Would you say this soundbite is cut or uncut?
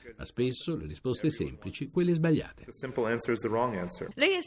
cut